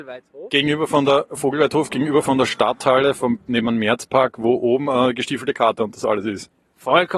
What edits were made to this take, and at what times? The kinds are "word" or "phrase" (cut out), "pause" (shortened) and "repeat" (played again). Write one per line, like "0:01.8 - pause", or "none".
none

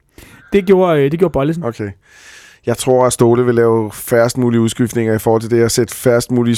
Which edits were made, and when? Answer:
none

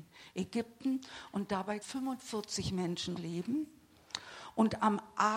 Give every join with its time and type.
0:01.8 - word
0:03.2 - word

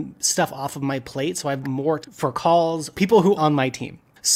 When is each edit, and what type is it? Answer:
0:01.6 - word
0:02.0 - word
0:02.9 - word
0:03.4 - word

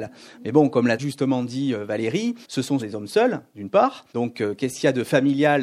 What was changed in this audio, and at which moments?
0:01.0 - word
0:02.4 - pause
0:02.8 - word
0:04.1 - pause

